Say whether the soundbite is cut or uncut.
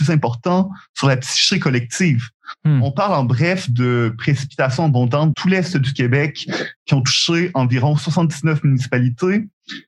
cut